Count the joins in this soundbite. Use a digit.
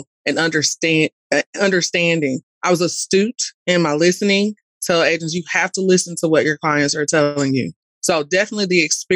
0